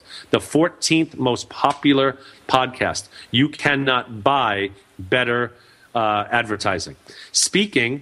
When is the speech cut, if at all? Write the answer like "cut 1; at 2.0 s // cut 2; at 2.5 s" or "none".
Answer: none